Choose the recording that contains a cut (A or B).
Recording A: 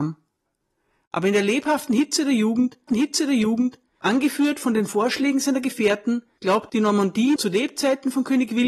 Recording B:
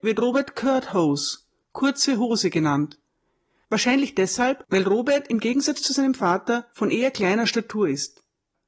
A